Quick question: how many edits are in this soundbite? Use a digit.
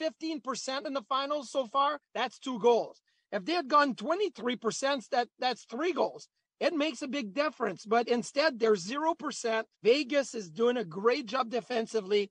2